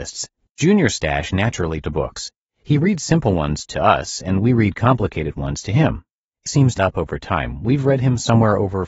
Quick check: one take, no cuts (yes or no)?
no